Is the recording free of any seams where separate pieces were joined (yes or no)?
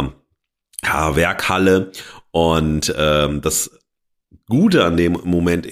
yes